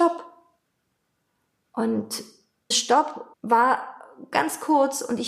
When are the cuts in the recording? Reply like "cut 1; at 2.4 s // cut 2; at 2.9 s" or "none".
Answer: cut 1; at 2.7 s // cut 2; at 3.3 s